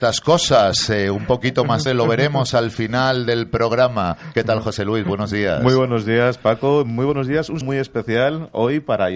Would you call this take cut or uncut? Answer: cut